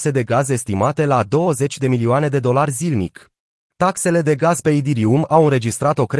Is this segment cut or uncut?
cut